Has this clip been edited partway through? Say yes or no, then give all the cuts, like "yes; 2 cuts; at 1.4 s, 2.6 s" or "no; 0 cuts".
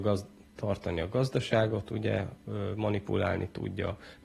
no; 0 cuts